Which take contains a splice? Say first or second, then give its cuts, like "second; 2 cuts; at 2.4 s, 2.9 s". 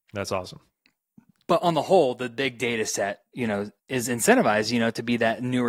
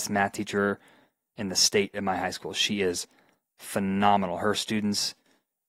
first; 1 cut; at 3.8 s